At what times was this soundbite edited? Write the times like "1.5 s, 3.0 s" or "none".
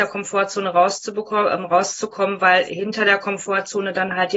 none